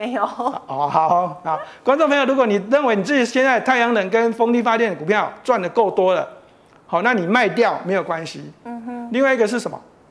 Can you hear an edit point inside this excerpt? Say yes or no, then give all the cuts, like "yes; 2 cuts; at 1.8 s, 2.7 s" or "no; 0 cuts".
no; 0 cuts